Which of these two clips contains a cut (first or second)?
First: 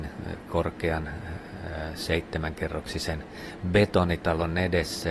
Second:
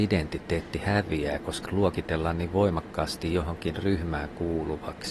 second